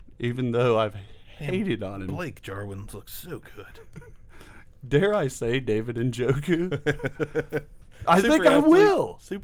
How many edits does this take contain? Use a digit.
0